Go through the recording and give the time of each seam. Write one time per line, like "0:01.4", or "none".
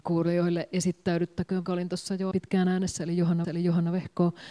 0:01.6
0:02.3
0:03.4